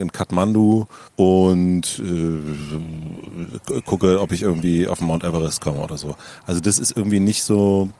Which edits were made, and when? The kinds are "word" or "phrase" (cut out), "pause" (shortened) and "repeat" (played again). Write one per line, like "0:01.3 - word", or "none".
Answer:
0:01.1 - pause